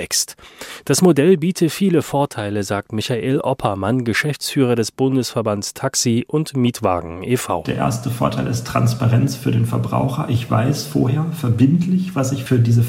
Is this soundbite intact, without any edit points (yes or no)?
yes